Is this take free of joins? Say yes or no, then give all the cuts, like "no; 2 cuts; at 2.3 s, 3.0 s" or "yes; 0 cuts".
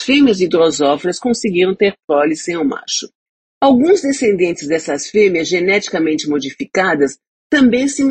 yes; 0 cuts